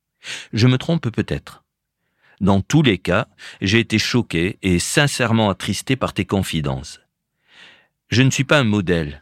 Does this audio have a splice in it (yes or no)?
no